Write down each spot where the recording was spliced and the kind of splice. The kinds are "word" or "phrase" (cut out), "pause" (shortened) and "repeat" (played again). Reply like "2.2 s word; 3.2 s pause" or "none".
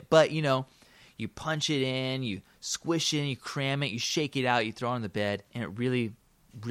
5.5 s pause